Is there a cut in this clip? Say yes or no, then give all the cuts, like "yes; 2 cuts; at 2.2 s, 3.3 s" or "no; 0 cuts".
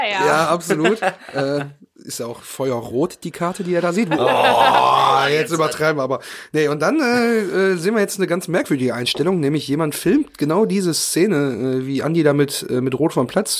no; 0 cuts